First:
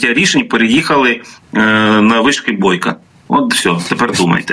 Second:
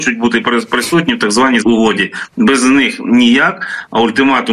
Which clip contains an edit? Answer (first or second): second